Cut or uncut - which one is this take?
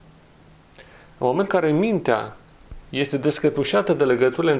cut